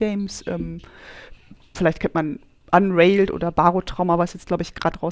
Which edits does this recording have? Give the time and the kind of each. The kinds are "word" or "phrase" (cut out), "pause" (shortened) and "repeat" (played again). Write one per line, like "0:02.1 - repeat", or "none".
none

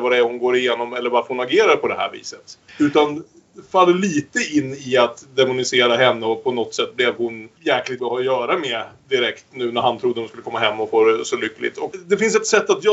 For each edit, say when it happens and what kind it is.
0:02.7 - pause
0:08.0 - word

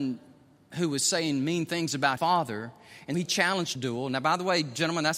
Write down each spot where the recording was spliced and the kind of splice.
0:02.2 - word
0:03.1 - word
0:03.8 - phrase

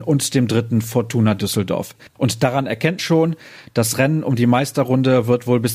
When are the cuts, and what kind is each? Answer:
0:02.1 - pause
0:03.0 - word

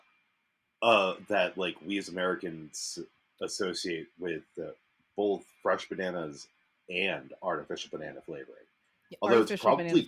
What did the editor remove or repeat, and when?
none

